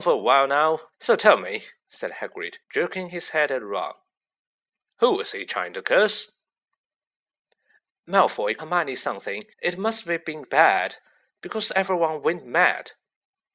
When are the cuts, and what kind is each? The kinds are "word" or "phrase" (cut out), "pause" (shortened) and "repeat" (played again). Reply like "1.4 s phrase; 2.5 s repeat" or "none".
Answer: 0.9 s pause; 1.8 s pause; 2.6 s pause; 8.6 s word; 9.5 s pause; 10.4 s word